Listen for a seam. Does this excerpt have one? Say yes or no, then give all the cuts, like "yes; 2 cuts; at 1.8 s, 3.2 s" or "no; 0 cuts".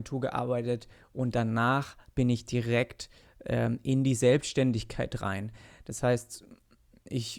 no; 0 cuts